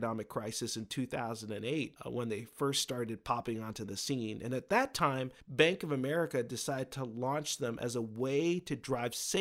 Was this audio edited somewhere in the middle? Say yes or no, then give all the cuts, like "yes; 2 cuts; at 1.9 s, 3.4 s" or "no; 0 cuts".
yes; 2 cuts; at 2.0 s, 5.4 s